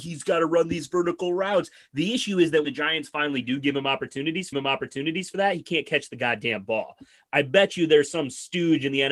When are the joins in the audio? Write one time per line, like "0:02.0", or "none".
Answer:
0:02.6
0:04.5